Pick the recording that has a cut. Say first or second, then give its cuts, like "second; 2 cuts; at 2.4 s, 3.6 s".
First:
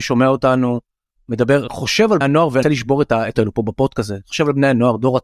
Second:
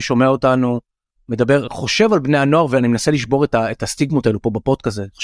first; 3 cuts; at 2.2 s, 2.6 s, 3.3 s